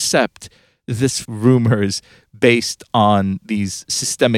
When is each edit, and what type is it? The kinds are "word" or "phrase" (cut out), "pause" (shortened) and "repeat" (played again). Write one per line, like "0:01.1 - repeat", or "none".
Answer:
0:01.2 - phrase